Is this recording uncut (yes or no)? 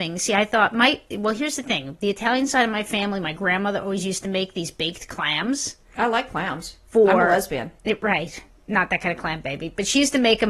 yes